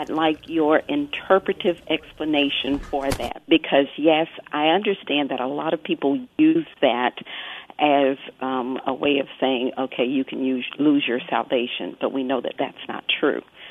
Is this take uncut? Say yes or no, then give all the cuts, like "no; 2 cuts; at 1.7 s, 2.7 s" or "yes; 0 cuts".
yes; 0 cuts